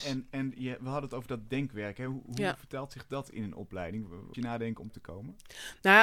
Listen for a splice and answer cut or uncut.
cut